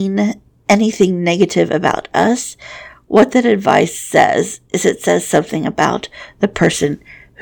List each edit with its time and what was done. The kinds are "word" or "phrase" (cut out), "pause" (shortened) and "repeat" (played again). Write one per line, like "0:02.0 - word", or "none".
none